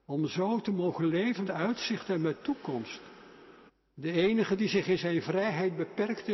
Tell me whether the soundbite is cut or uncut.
cut